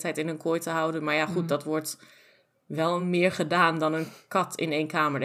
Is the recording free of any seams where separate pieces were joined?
yes; 0 cuts

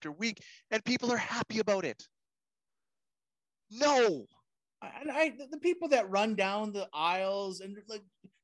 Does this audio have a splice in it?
no; 0 cuts

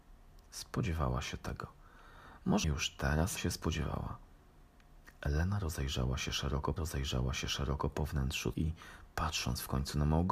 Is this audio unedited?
no; 5 cuts; at 2.6 s, 3.4 s, 5.2 s, 6.8 s, 8.5 s

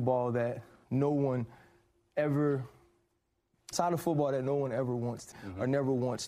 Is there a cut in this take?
yes; 2 cuts; at 3.7 s, 5.3 s

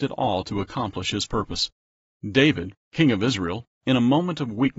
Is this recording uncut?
yes; 0 cuts

